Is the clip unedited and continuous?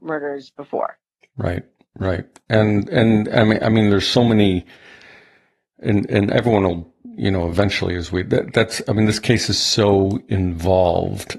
yes; 0 cuts

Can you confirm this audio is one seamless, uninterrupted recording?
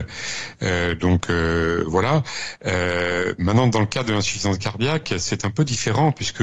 yes; 0 cuts

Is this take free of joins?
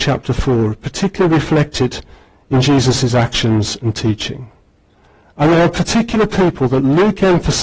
yes; 0 cuts

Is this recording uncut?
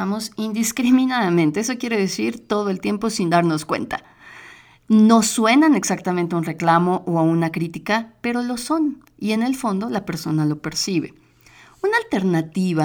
yes; 0 cuts

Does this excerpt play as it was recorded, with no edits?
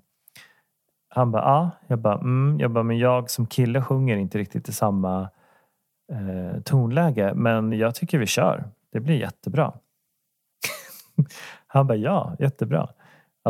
yes; 0 cuts

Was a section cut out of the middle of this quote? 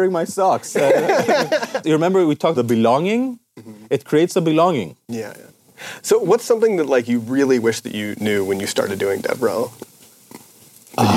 yes; 2 cuts; at 2.5 s, 5.0 s

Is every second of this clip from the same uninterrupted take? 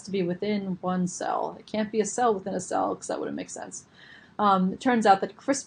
yes; 0 cuts

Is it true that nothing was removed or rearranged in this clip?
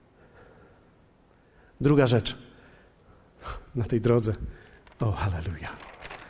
yes; 0 cuts

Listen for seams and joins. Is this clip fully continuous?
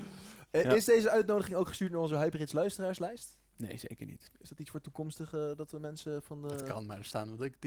yes; 0 cuts

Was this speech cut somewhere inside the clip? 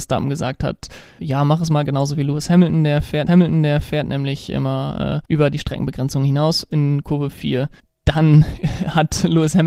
yes; 4 cuts; at 1.2 s, 3.3 s, 5.3 s, 7.8 s

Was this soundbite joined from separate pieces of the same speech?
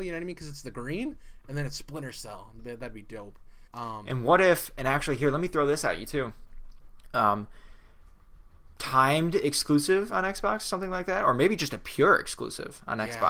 yes; 1 cut; at 3.7 s

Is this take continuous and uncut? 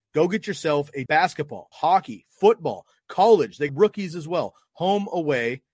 no; 3 cuts; at 1.1 s, 1.7 s, 3.7 s

